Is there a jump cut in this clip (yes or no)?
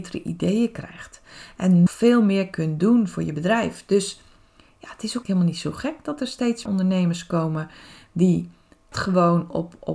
yes